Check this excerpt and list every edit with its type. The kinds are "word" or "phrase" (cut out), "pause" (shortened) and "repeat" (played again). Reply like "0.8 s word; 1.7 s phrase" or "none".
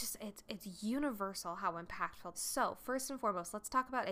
2.3 s phrase

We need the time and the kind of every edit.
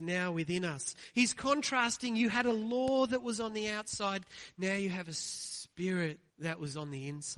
6.3 s pause

